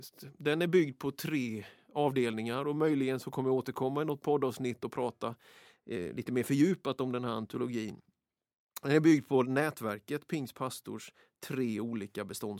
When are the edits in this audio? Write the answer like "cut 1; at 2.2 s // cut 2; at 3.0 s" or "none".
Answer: none